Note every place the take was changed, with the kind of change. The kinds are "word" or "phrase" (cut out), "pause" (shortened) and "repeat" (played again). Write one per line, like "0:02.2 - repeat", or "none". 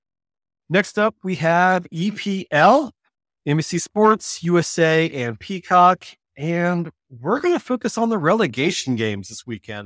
none